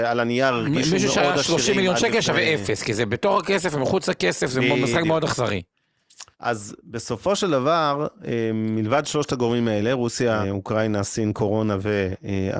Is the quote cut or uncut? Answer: cut